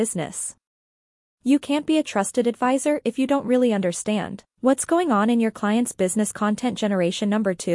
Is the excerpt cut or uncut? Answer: uncut